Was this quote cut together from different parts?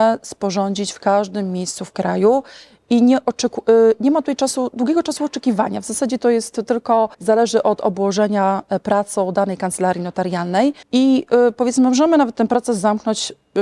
yes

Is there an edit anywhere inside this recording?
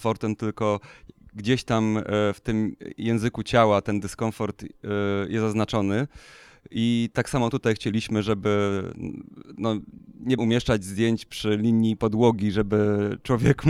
yes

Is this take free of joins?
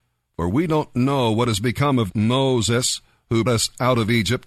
no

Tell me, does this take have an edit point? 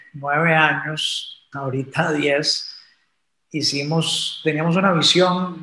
yes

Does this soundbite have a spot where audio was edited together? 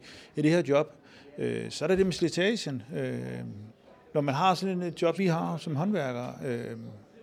yes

